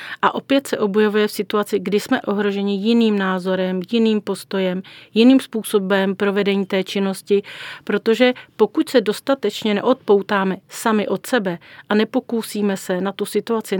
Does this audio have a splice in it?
yes; 1 cut; at 2.2 s

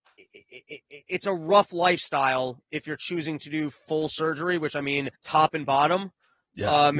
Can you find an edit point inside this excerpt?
yes; 1 cut; at 5.2 s

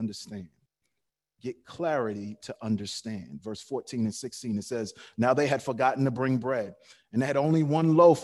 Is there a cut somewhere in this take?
no; 0 cuts

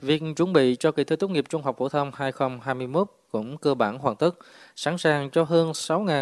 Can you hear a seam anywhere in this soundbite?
no; 0 cuts

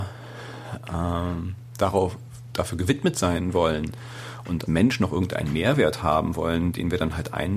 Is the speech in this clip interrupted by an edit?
yes; 1 cut; at 4.7 s

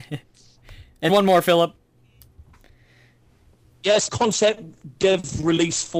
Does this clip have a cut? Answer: yes; 2 cuts; at 1.1 s, 4.1 s

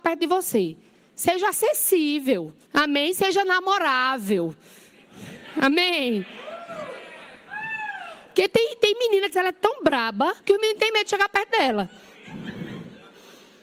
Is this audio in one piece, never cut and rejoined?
no; 3 cuts; at 2.6 s, 9.3 s, 10.4 s

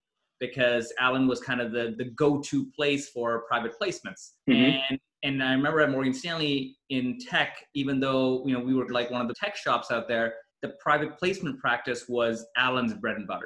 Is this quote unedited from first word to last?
no; 5 cuts; at 1.9 s, 4.4 s, 8.9 s, 9.3 s, 10.5 s

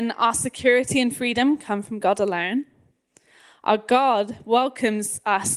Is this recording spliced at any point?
no; 0 cuts

